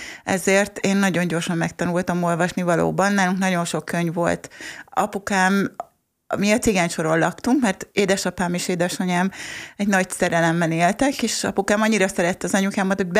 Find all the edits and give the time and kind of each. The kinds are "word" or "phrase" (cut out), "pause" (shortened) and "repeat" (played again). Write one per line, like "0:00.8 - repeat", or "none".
none